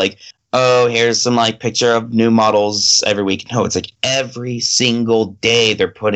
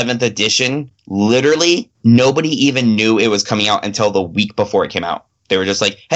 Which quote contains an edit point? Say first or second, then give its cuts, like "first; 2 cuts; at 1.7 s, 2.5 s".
second; 1 cut; at 1.9 s